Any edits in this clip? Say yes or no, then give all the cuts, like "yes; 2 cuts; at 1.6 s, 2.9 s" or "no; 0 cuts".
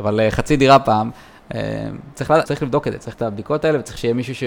yes; 2 cuts; at 2.4 s, 3.1 s